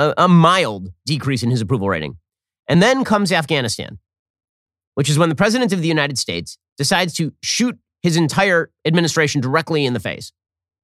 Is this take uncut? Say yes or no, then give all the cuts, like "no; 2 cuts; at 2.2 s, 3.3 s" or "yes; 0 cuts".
yes; 0 cuts